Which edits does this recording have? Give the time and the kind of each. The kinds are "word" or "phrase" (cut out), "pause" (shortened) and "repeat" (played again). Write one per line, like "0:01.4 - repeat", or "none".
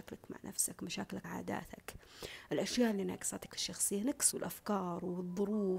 0:01.2 - word
0:03.5 - word
0:04.3 - word